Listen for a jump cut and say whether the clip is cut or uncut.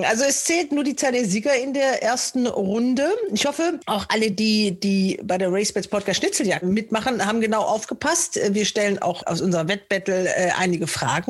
uncut